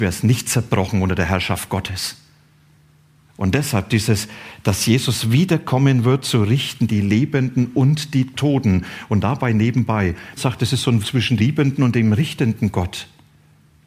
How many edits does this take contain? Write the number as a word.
three